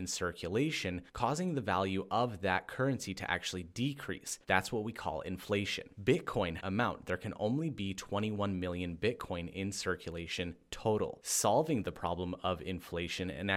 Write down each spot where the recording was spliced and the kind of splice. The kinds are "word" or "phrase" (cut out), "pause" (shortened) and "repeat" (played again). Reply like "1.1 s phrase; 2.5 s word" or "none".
1.1 s pause; 4.4 s pause; 6.6 s phrase